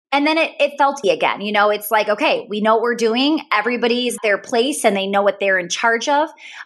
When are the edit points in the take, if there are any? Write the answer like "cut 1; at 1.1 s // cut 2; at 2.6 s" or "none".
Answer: cut 1; at 1.0 s // cut 2; at 4.2 s